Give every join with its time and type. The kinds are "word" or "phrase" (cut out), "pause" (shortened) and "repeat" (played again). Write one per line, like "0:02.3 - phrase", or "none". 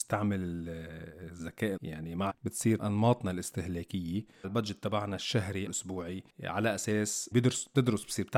0:01.8 - word
0:02.3 - word
0:02.8 - word
0:04.4 - word
0:05.7 - word
0:07.3 - word